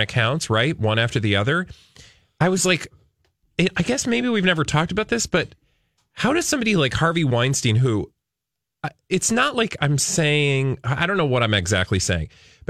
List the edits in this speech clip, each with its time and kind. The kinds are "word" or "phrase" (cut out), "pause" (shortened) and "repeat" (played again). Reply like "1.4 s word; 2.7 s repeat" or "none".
none

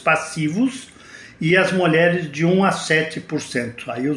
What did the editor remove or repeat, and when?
none

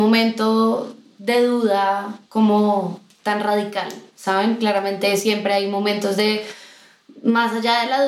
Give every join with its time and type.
2.3 s pause

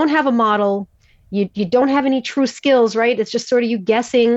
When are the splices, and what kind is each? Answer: none

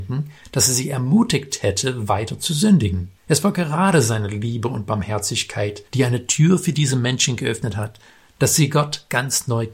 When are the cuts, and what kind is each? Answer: 3.2 s pause

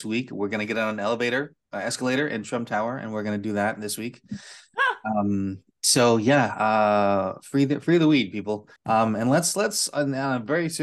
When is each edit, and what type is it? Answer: 1.6 s pause; 5.7 s pause; 8.8 s pause

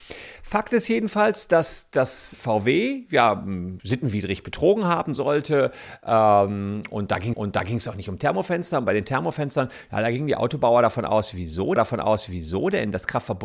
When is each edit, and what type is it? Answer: 2.3 s word; 3.8 s word; 7.3 s repeat; 11.8 s repeat

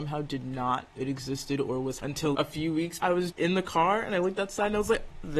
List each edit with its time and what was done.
0.9 s word; 2.0 s word; 2.3 s word; 3.0 s word; 3.3 s word

